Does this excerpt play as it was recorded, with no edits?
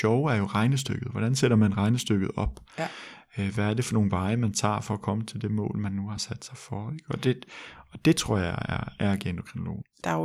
yes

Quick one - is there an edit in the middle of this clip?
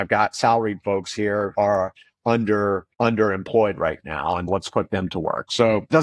yes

